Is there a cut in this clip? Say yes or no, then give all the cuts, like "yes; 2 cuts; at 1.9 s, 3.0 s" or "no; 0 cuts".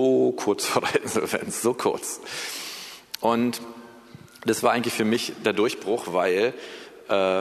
no; 0 cuts